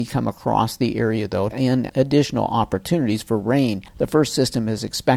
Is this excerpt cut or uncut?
cut